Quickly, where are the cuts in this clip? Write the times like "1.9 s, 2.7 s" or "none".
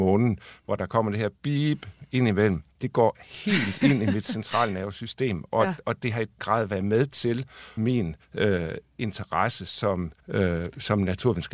2.7 s, 6.4 s, 7.8 s, 8.2 s, 10.2 s